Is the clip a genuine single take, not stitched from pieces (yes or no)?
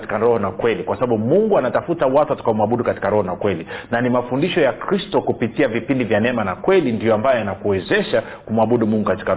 yes